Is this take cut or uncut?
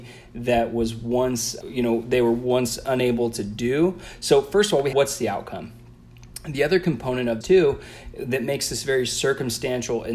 cut